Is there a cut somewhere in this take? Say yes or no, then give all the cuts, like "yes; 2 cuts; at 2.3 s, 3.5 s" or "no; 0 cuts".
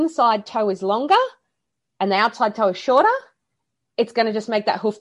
no; 0 cuts